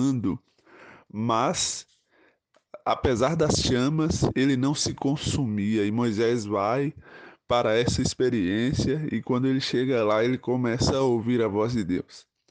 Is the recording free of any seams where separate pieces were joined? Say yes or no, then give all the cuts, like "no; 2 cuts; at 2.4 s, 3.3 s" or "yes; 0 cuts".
yes; 0 cuts